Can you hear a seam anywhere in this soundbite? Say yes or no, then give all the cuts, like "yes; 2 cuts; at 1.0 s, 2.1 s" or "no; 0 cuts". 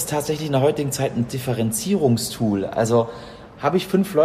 yes; 1 cut; at 1.3 s